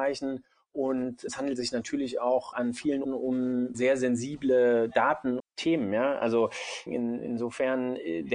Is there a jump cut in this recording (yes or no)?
yes